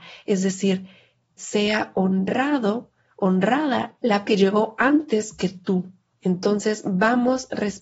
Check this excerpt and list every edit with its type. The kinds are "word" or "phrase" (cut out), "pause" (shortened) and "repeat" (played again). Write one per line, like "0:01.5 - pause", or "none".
0:01.4 - word
0:04.2 - word
0:06.1 - pause